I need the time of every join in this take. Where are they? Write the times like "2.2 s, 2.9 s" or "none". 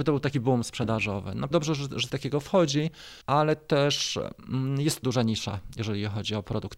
1.5 s, 2.1 s, 3.2 s, 5.0 s